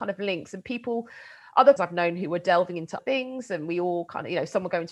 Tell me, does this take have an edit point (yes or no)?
yes